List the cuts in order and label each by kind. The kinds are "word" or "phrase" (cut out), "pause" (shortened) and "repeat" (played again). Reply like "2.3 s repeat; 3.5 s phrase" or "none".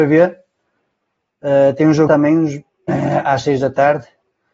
2.1 s word